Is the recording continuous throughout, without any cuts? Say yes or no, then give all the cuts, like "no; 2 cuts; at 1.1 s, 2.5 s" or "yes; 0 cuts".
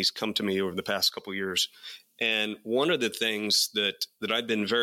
yes; 0 cuts